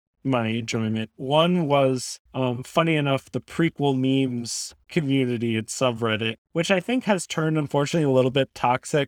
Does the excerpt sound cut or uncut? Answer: cut